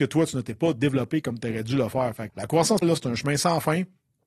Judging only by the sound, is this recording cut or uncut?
cut